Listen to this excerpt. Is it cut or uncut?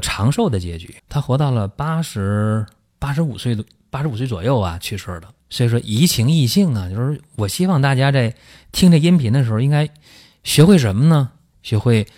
cut